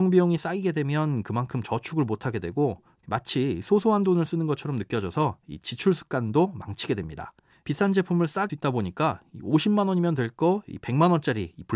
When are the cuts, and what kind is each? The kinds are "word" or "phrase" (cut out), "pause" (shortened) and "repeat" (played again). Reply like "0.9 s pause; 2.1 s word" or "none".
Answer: 7.5 s pause; 8.5 s phrase